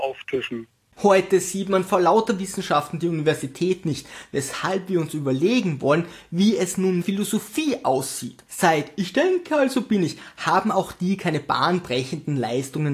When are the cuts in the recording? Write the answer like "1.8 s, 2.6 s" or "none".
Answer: 7.0 s, 8.5 s

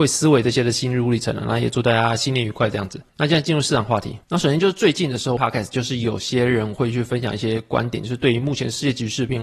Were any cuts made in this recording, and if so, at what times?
3.1 s, 4.2 s, 5.4 s

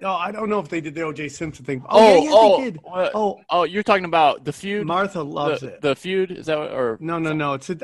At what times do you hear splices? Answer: 3.4 s

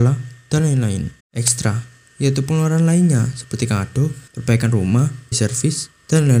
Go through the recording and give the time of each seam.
1.2 s, 4.3 s, 5.3 s

